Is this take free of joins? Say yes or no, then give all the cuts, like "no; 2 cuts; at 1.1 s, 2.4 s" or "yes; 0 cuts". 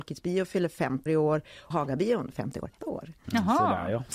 no; 4 cuts; at 1.1 s, 1.7 s, 2.3 s, 2.8 s